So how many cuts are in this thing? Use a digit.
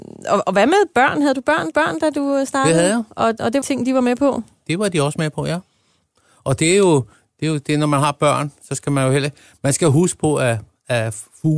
2